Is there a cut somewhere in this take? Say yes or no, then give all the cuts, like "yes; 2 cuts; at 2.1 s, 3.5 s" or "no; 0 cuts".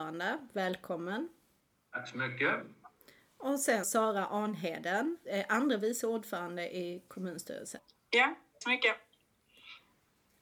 yes; 3 cuts; at 3.8 s, 5.3 s, 8.6 s